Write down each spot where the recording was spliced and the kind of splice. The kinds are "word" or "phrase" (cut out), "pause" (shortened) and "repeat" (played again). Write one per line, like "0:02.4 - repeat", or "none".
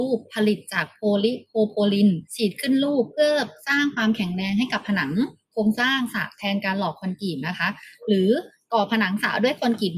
0:02.3 - pause

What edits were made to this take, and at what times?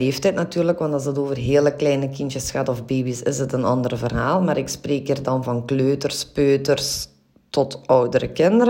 none

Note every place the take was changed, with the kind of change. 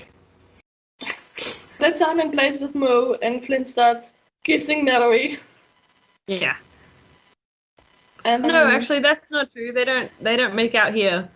0:01.8 - word
0:04.3 - pause
0:08.4 - word

